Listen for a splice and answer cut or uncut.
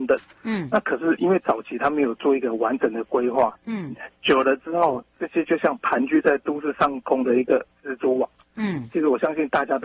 cut